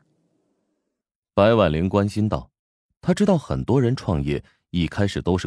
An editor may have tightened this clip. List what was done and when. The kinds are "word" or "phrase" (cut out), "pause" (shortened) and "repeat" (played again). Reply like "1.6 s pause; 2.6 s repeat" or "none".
2.6 s pause